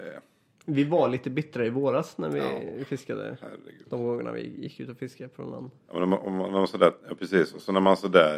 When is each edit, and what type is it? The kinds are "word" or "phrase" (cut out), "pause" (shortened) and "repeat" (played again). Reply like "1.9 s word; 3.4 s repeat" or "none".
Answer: 5.8 s pause; 7.0 s pause